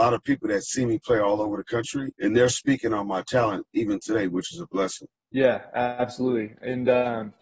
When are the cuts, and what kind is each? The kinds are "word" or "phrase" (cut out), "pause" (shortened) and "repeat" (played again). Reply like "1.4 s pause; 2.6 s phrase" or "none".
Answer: 2.1 s pause; 5.2 s pause